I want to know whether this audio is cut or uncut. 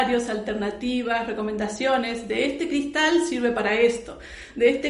uncut